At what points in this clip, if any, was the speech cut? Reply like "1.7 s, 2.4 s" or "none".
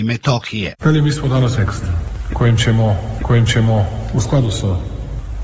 1.6 s, 3.2 s

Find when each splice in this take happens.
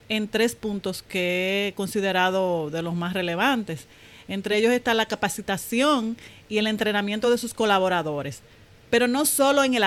none

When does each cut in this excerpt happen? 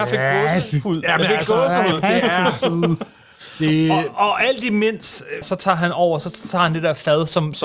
5.4 s

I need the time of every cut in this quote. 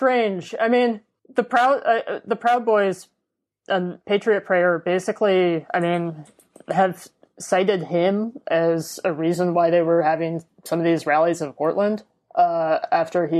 none

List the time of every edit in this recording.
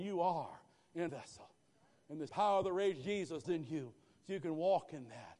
1.1 s, 2.3 s, 3.4 s

